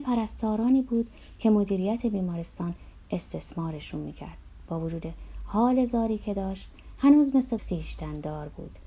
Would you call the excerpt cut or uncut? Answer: cut